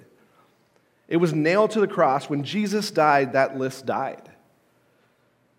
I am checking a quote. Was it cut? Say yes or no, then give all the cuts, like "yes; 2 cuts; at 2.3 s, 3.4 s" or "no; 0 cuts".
no; 0 cuts